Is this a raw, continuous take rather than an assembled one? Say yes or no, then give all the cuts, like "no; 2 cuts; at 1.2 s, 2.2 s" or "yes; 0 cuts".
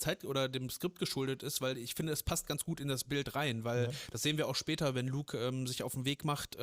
yes; 0 cuts